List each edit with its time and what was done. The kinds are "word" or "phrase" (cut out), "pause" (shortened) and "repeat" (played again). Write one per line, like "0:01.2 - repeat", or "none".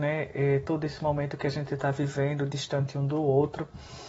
none